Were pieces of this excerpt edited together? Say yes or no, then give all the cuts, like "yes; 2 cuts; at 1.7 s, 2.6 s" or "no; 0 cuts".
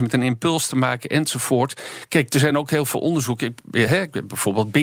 no; 0 cuts